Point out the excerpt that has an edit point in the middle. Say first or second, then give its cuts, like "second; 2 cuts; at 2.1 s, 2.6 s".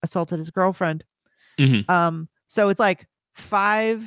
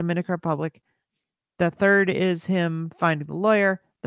first; 1 cut; at 2.8 s